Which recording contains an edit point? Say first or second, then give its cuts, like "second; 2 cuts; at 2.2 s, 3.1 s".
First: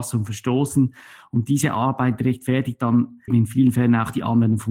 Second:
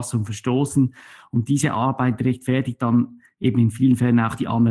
first; 1 cut; at 3.3 s